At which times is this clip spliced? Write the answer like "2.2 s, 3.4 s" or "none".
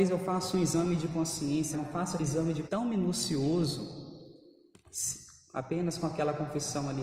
1.7 s, 2.2 s, 2.7 s